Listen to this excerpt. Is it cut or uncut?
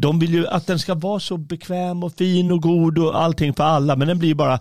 uncut